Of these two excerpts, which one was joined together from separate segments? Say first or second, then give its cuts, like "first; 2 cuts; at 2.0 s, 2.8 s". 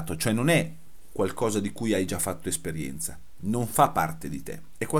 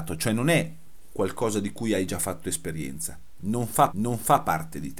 second; 1 cut; at 3.9 s